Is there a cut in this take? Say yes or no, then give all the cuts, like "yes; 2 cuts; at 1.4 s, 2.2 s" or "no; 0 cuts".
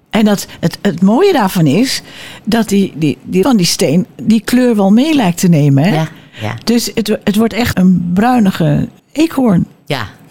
yes; 3 cuts; at 3.4 s, 7.7 s, 9.0 s